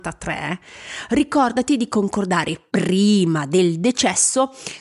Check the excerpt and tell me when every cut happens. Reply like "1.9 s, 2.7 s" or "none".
none

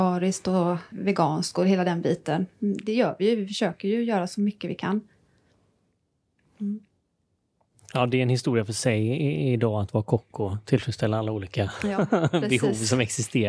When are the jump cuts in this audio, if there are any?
0.9 s

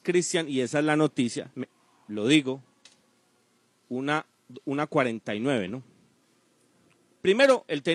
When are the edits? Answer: none

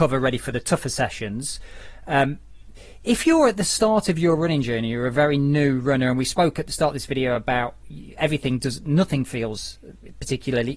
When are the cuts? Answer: none

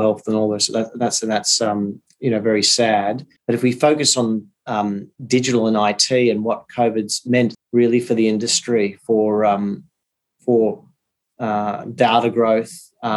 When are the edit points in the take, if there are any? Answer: 3.4 s, 5.2 s, 7.5 s

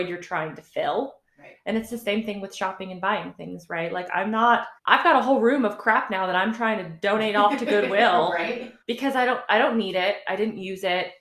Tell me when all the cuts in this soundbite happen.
4.8 s, 8.8 s

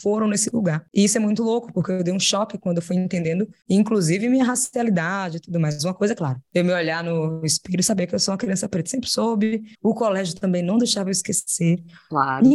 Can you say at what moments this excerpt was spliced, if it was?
9.7 s

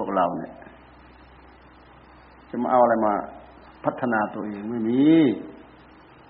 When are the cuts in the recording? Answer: none

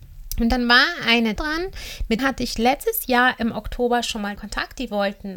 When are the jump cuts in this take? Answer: 1.4 s, 2.2 s, 4.4 s

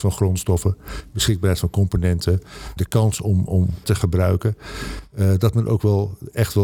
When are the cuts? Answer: 2.8 s, 3.8 s

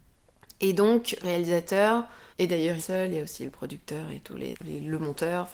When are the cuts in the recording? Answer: 1.2 s, 2.3 s, 2.8 s, 4.5 s

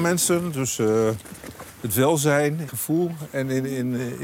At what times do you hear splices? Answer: 2.7 s

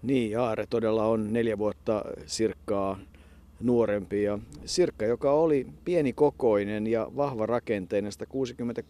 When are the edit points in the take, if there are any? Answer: none

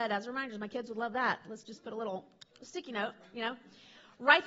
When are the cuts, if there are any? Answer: none

